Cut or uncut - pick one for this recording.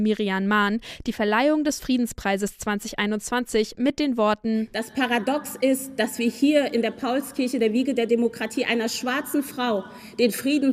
uncut